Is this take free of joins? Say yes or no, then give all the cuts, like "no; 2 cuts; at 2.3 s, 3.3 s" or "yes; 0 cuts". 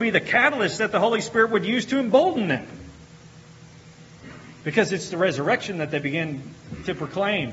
yes; 0 cuts